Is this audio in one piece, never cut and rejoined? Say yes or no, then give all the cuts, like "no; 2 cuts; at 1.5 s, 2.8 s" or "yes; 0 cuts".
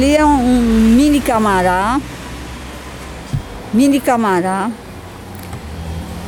yes; 0 cuts